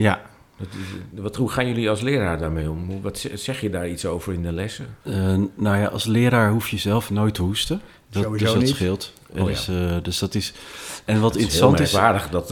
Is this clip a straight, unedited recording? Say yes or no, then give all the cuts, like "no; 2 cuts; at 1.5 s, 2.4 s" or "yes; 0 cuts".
no; 1 cut; at 5.0 s